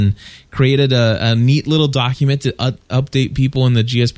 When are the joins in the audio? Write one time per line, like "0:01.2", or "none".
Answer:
none